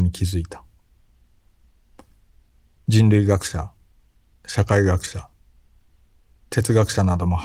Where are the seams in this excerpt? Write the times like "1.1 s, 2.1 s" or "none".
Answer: none